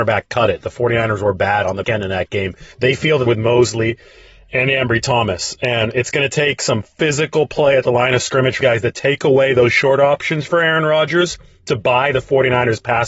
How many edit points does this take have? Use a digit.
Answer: 4